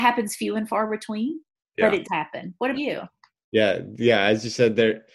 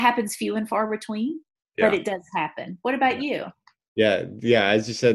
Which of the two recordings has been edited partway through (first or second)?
first